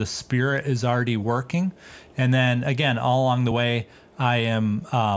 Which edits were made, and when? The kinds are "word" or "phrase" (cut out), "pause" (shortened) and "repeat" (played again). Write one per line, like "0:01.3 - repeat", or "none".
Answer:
none